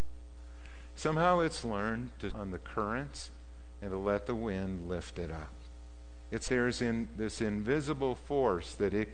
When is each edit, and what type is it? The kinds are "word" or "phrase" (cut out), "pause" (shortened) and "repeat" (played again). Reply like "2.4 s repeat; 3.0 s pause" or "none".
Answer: 2.3 s word; 6.5 s word